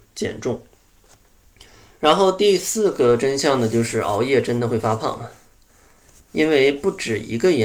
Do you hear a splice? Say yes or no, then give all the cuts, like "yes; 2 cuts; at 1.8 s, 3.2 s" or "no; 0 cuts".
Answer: no; 0 cuts